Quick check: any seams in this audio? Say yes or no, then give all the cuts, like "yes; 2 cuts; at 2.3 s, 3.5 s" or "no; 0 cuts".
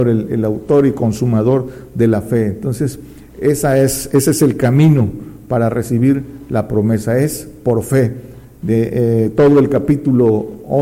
no; 0 cuts